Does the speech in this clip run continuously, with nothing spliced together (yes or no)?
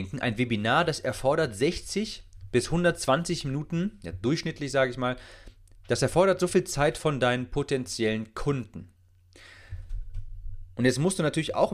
yes